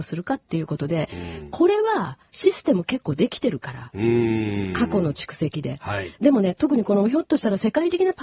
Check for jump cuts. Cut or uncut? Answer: cut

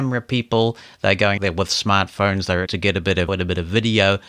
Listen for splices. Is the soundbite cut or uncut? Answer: cut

